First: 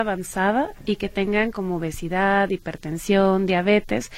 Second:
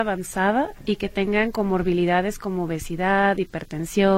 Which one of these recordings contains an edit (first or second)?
first